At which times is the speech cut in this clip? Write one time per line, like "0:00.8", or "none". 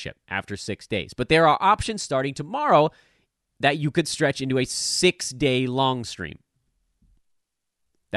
none